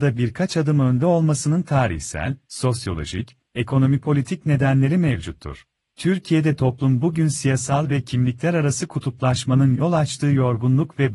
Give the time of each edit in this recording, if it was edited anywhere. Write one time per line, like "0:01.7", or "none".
0:05.8